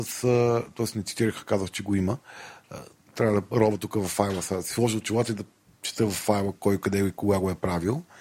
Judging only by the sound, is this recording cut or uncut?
uncut